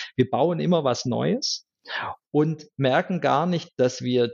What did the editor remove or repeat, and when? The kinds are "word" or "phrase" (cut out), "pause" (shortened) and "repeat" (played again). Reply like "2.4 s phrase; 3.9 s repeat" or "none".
none